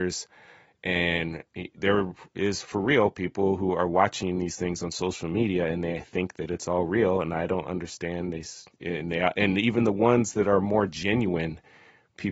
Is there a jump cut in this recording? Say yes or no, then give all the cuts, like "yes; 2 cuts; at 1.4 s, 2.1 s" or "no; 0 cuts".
yes; 1 cut; at 8.7 s